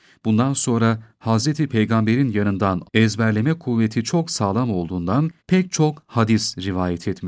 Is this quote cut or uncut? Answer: cut